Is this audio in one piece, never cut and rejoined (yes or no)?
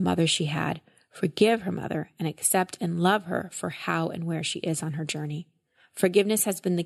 yes